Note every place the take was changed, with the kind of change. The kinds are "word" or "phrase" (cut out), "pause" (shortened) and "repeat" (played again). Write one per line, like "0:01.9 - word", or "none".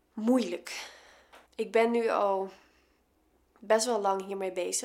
0:01.5 - pause